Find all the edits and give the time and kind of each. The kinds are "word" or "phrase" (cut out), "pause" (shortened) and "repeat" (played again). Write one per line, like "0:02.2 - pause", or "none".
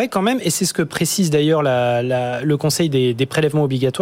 none